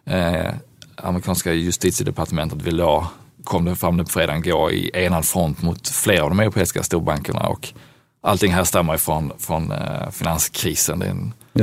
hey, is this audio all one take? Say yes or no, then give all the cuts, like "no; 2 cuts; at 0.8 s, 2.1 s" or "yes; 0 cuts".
yes; 0 cuts